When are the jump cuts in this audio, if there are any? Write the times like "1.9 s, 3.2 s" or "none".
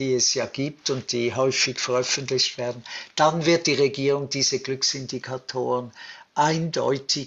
none